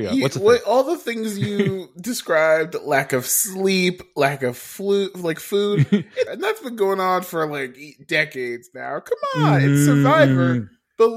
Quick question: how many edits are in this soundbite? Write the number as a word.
one